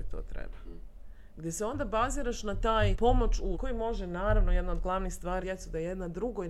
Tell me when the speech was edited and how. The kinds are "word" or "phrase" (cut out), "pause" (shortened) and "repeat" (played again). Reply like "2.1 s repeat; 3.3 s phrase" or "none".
2.9 s word; 3.5 s word; 5.4 s phrase

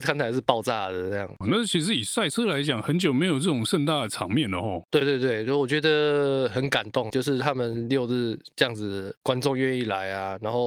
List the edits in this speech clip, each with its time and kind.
7.1 s word

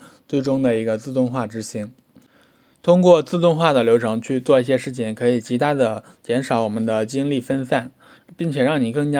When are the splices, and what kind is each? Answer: none

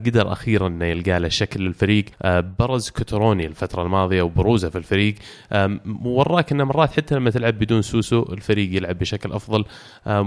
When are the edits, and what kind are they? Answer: 2.1 s pause

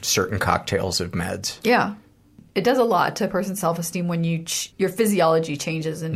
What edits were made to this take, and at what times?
4.7 s word

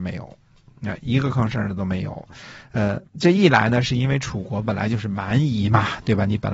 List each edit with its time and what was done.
3.1 s pause

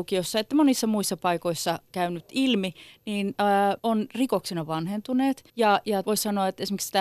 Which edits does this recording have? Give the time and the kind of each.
1.9 s word; 3.3 s word; 3.8 s pause; 5.5 s pause; 6.0 s word

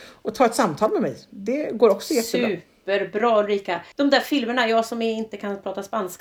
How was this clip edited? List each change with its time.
3.9 s pause

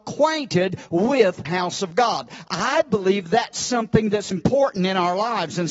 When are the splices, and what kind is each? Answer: 1.5 s word; 4.3 s word

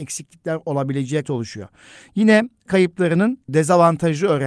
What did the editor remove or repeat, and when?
1.2 s word; 2.7 s word; 3.5 s word

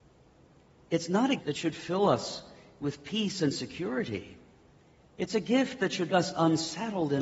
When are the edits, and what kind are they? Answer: 1.4 s word; 6.1 s word

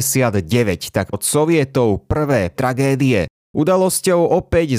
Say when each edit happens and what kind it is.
1.1 s word; 2.5 s word

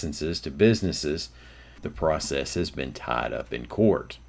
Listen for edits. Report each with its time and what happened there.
none

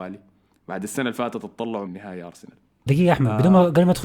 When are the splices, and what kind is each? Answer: 1.9 s word; 2.9 s word

